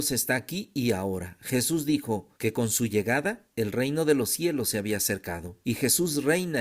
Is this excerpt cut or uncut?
cut